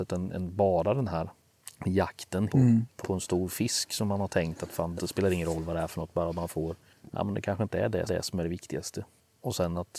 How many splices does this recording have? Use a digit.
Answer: 4